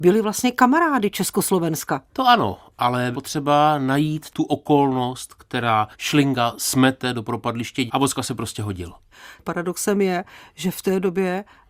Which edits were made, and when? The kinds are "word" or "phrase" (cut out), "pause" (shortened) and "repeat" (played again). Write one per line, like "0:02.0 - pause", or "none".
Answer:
0:02.1 - pause
0:03.1 - word
0:07.9 - word

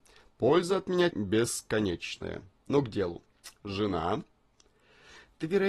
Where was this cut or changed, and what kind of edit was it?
0:01.1 - word

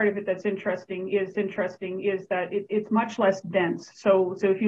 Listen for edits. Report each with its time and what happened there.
0:01.3 - repeat

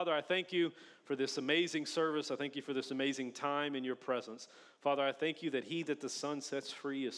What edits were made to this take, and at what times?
none

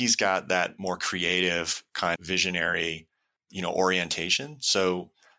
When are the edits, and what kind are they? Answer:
0:02.2 - word

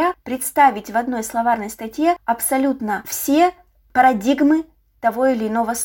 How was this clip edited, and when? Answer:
none

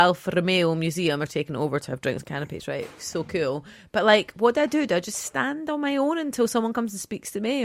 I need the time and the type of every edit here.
none

